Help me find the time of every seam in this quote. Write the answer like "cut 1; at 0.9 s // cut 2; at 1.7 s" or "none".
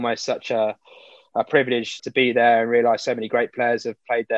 cut 1; at 2.0 s